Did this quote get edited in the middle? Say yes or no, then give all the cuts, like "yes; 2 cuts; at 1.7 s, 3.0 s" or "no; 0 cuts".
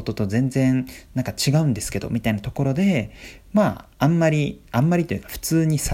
yes; 1 cut; at 3.9 s